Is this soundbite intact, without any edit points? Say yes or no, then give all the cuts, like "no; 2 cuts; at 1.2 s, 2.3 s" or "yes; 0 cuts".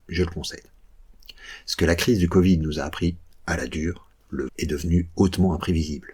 no; 2 cuts; at 4.1 s, 4.5 s